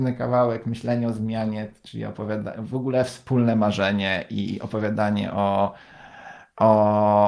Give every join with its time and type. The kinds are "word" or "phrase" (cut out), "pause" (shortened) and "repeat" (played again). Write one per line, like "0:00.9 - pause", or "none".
none